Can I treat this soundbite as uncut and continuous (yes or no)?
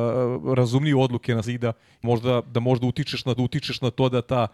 no